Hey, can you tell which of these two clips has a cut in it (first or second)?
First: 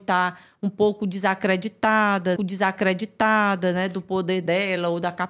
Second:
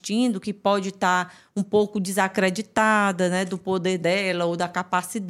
first